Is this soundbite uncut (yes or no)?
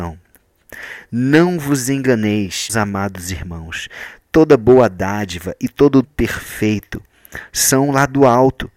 no